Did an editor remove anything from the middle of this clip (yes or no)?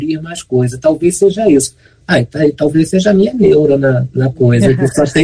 no